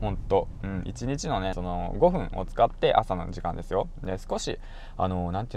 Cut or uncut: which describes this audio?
cut